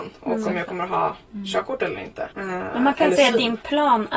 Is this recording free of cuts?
no; 1 cut; at 2.3 s

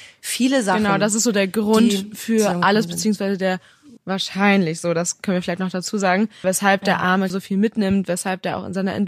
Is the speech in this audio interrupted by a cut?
yes; 3 cuts; at 4.0 s, 6.4 s, 7.3 s

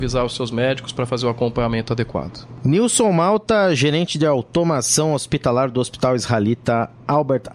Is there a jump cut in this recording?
no; 0 cuts

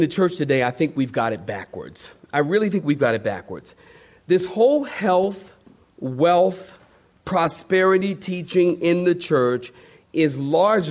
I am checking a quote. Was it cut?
no; 0 cuts

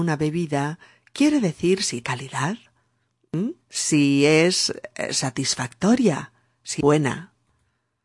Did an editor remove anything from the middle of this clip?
yes; 3 cuts; at 2.0 s, 3.6 s, 6.8 s

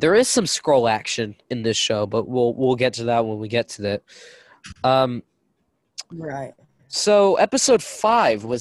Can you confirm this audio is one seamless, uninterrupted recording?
yes; 0 cuts

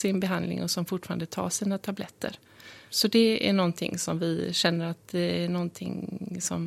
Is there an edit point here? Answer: no; 0 cuts

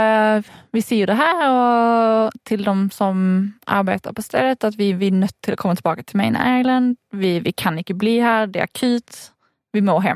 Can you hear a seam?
no; 0 cuts

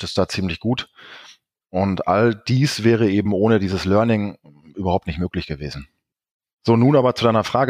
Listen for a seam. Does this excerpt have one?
no; 0 cuts

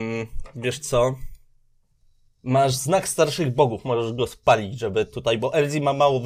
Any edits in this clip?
yes; 1 cut; at 2.0 s

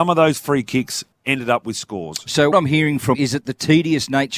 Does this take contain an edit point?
yes; 3 cuts; at 1.1 s, 2.5 s, 3.1 s

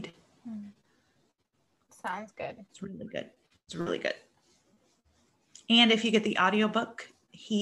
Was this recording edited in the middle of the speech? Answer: no; 0 cuts

